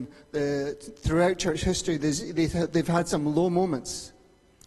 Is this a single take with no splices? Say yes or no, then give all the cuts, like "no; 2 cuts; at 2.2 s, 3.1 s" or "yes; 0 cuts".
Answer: yes; 0 cuts